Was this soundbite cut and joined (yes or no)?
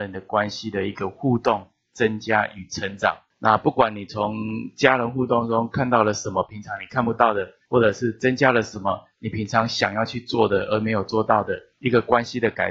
no